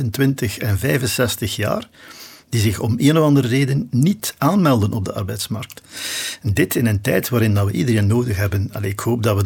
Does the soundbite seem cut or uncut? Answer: uncut